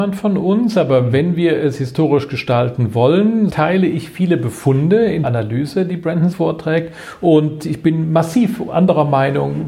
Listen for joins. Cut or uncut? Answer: cut